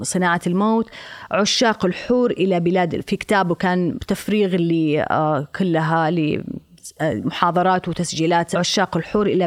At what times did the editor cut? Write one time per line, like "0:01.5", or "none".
0:08.5